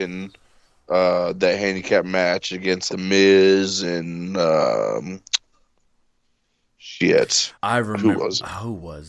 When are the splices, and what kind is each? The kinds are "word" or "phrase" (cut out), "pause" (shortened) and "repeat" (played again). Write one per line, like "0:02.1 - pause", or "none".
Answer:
0:02.9 - word
0:07.5 - pause